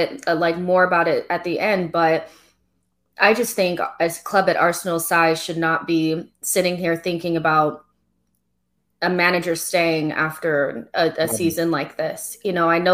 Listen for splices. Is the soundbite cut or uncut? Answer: uncut